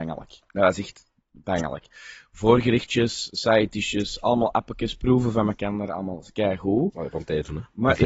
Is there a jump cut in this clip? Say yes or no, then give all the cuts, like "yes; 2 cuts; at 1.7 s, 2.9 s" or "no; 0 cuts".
no; 0 cuts